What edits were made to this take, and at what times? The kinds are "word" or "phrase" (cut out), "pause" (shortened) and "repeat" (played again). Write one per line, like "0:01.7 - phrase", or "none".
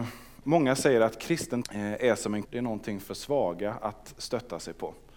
0:01.6 - word
0:02.4 - word